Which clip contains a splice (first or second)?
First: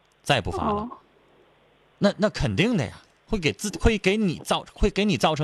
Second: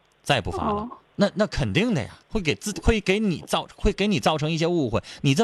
second